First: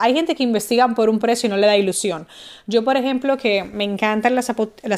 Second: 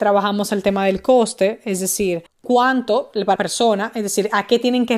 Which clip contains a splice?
second; 2 cuts; at 2.3 s, 3.4 s

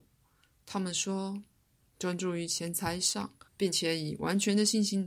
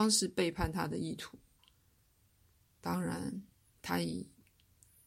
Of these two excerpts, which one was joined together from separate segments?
first; 1 cut; at 3.5 s

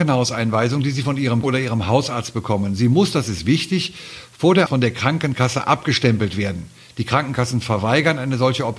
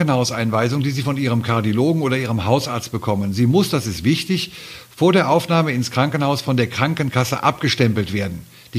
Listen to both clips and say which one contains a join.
first; 2 cuts; at 1.4 s, 4.7 s

